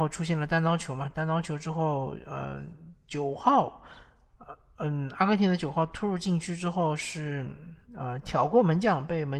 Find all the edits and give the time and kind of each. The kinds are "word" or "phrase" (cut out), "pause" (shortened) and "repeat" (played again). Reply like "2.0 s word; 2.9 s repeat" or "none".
none